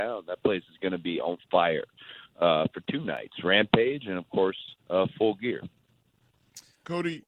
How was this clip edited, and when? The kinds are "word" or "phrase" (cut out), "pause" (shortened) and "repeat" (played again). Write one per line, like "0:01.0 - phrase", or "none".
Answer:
0:04.8 - pause

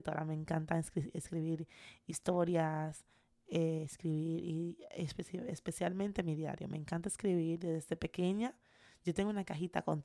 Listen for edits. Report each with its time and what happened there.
none

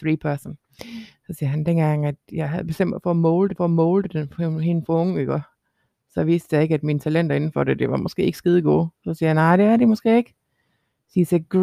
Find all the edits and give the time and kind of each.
0:03.5 - repeat
0:09.0 - pause

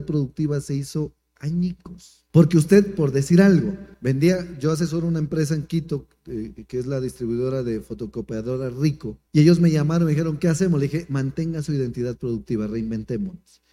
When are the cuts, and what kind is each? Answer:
0:02.3 - pause
0:03.9 - pause
0:09.3 - pause

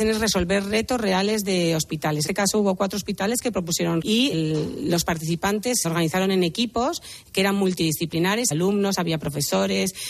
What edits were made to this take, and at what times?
0:02.3 - word
0:04.0 - word
0:04.3 - word
0:05.8 - word
0:08.5 - word

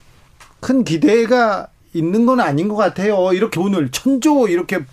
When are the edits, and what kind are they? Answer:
0:03.5 - word

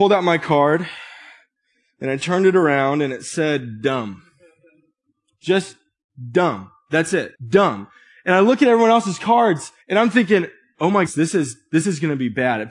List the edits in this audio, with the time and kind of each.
0:07.4 - pause
0:09.8 - pause
0:11.1 - word

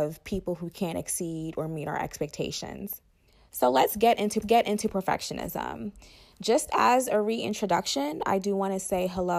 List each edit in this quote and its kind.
0:03.3 - pause
0:04.4 - repeat

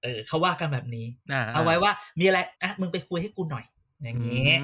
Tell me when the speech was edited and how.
0:02.5 - pause

